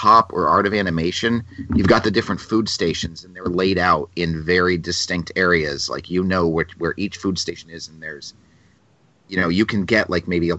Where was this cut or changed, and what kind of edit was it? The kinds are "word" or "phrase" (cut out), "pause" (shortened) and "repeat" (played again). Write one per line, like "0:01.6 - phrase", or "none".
none